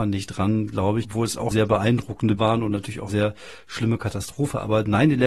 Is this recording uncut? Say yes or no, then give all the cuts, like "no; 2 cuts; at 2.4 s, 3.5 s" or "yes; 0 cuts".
no; 4 cuts; at 1.0 s, 1.5 s, 2.4 s, 3.1 s